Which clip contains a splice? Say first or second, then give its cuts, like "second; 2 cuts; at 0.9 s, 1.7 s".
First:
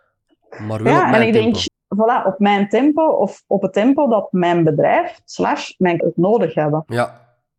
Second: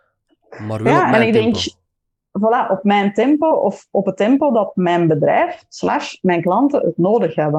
first; 2 cuts; at 1.7 s, 6.0 s